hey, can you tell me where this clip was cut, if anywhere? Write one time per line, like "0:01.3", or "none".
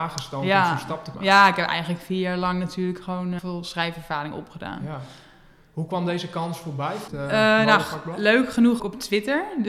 0:01.1
0:03.4
0:07.1
0:08.8